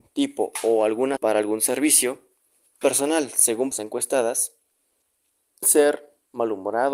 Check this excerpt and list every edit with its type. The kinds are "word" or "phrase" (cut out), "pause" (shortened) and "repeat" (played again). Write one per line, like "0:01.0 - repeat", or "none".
0:01.2 - word
0:02.8 - word
0:03.7 - word
0:05.6 - word